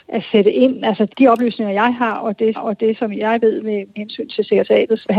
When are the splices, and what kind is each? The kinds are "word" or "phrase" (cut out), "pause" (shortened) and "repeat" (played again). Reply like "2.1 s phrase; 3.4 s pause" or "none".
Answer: 2.5 s repeat